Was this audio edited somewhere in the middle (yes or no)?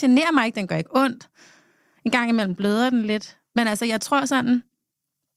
no